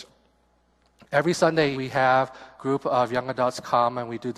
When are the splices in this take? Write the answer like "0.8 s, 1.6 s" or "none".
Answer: 1.7 s, 2.6 s